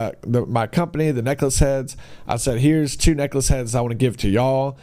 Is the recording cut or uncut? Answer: uncut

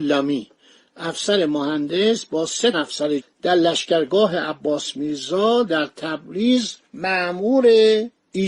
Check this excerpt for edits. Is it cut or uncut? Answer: cut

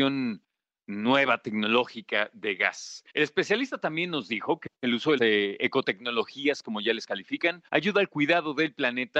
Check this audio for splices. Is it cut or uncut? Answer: cut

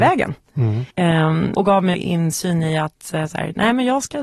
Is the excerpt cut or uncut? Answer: cut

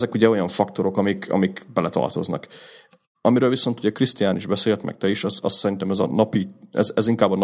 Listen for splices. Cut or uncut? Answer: uncut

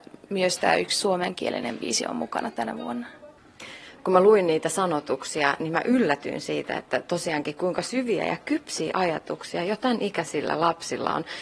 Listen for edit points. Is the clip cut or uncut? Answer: uncut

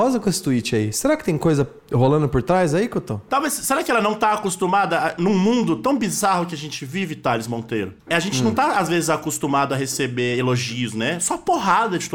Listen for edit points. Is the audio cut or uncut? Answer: cut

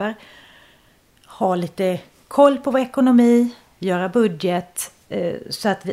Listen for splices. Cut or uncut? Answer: uncut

